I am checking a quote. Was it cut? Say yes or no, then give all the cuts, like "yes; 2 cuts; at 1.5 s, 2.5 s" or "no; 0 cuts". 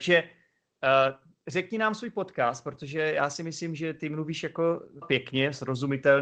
yes; 1 cut; at 5.0 s